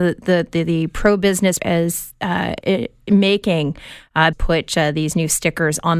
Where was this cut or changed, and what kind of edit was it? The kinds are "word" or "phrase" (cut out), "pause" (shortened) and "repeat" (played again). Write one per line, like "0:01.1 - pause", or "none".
0:01.6 - word
0:02.6 - word
0:04.3 - word